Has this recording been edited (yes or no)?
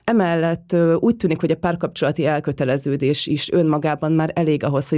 no